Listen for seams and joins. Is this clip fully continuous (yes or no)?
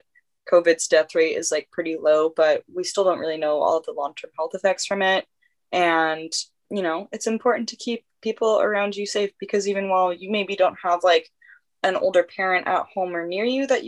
yes